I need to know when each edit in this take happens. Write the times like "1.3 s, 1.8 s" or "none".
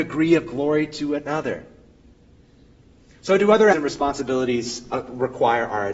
3.7 s